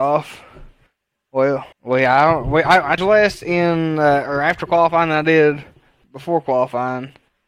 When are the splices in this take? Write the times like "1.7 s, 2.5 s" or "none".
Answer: 1.7 s, 3.0 s